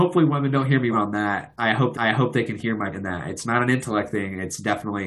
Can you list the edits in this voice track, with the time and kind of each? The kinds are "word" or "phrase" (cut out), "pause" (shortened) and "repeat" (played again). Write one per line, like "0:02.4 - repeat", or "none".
0:00.9 - word
0:01.9 - repeat
0:02.9 - word